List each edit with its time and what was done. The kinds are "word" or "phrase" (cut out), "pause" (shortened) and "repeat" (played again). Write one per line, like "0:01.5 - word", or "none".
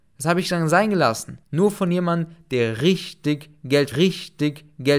0:01.4 - pause
0:03.9 - repeat